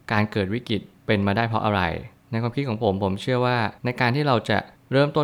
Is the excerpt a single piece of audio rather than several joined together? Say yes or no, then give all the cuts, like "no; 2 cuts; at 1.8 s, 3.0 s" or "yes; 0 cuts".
no; 1 cut; at 3.8 s